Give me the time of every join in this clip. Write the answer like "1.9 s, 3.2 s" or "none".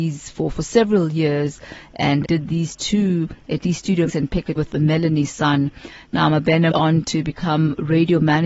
2.2 s, 4.1 s, 4.5 s, 6.7 s